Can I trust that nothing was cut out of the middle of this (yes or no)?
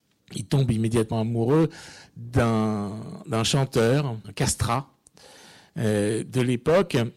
no